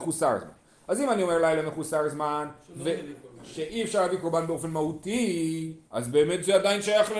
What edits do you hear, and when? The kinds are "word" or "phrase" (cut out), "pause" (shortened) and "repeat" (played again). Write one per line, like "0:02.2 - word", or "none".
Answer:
0:05.8 - pause